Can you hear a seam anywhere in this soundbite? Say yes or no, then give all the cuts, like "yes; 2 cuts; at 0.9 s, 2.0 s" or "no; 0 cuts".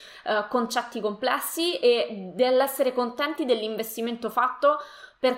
no; 0 cuts